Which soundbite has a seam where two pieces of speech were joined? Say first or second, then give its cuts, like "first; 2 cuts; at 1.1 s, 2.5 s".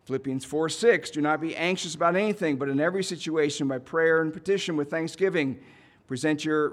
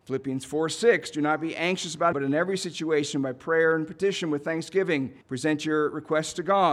second; 2 cuts; at 2.1 s, 5.2 s